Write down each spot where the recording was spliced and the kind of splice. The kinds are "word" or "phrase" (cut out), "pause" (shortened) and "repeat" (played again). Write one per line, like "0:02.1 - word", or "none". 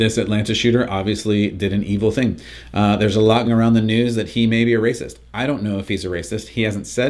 0:03.4 - word